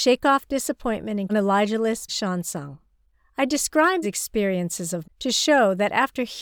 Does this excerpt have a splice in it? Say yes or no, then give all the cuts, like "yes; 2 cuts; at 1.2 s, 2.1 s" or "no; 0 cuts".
yes; 5 cuts; at 1.3 s, 2.1 s, 3.1 s, 4.0 s, 5.0 s